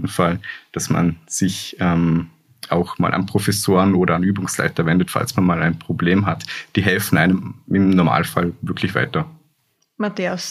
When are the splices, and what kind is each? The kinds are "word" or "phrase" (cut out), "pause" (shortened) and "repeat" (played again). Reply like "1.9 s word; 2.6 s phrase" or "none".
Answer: none